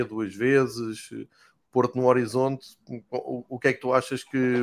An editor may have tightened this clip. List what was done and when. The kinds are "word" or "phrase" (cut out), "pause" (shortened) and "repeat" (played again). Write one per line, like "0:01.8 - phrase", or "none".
none